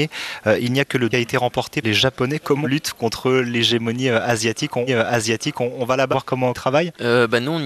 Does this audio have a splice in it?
yes; 6 cuts; at 1.1 s, 1.8 s, 2.6 s, 4.9 s, 6.1 s, 6.5 s

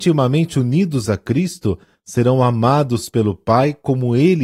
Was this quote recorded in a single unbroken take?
yes; 0 cuts

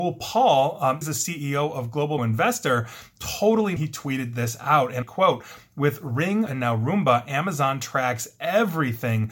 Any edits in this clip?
yes; 5 cuts; at 1.0 s, 2.2 s, 3.8 s, 5.0 s, 6.5 s

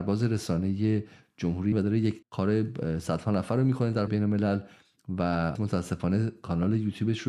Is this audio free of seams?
no; 4 cuts; at 1.7 s, 2.2 s, 4.1 s, 5.6 s

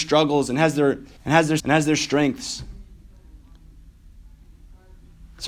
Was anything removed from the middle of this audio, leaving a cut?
yes; 2 cuts; at 1.2 s, 1.6 s

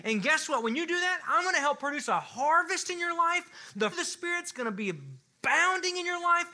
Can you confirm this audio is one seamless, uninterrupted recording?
no; 1 cut; at 3.9 s

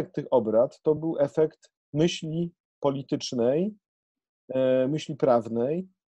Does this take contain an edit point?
no; 0 cuts

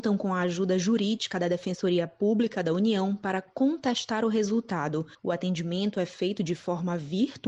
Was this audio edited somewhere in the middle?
no; 0 cuts

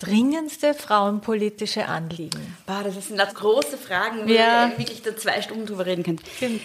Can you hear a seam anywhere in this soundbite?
yes; 1 cut; at 3.3 s

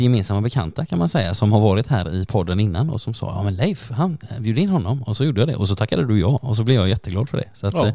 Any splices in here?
no; 0 cuts

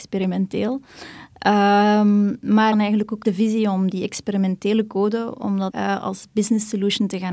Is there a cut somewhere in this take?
yes; 3 cuts; at 2.7 s, 3.2 s, 5.7 s

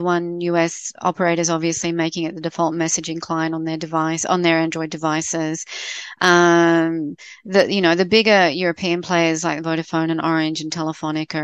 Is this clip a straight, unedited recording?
yes; 0 cuts

